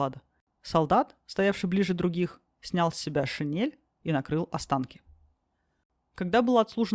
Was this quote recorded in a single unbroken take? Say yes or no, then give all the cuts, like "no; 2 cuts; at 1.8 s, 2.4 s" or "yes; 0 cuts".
yes; 0 cuts